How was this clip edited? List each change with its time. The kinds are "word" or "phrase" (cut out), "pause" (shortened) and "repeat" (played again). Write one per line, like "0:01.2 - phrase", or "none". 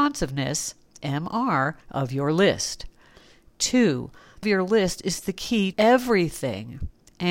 0:01.8 - pause
0:04.4 - phrase
0:05.7 - word